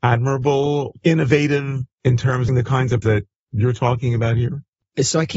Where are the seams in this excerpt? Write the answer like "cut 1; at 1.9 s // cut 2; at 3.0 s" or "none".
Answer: cut 1; at 0.9 s // cut 2; at 1.9 s // cut 3; at 2.5 s // cut 4; at 3.0 s